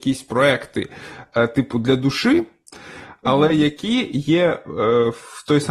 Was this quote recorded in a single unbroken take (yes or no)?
yes